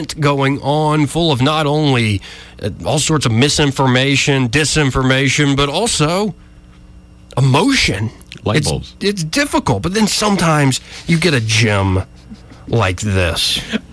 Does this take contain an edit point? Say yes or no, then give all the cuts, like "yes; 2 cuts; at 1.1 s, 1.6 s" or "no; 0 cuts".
no; 0 cuts